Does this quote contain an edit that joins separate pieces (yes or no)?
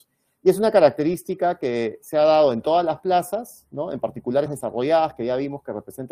yes